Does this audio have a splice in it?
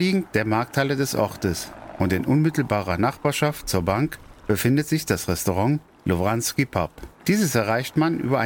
yes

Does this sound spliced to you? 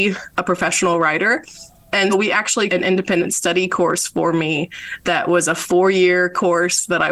yes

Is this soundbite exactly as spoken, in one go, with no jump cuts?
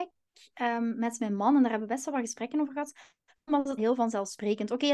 no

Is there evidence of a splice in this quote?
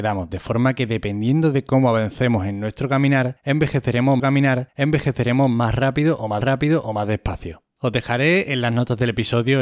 yes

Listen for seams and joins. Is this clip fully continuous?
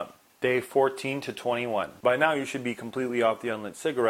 yes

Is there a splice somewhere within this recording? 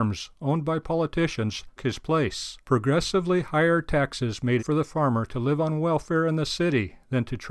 yes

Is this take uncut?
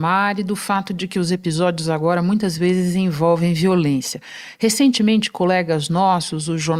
yes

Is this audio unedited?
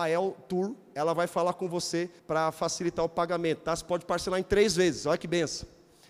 no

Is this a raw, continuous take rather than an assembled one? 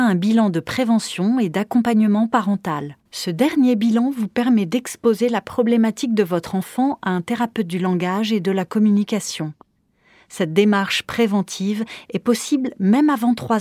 no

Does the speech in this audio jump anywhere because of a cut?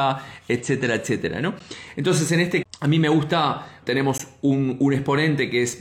yes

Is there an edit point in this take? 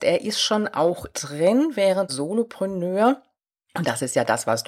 yes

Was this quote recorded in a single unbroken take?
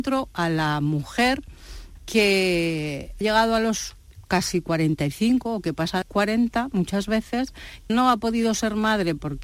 no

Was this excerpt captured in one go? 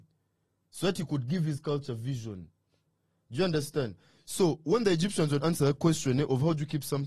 no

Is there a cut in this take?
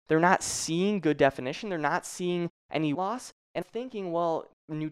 yes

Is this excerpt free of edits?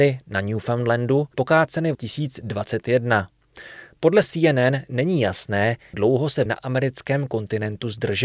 no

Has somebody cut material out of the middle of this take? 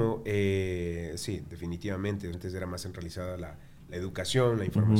yes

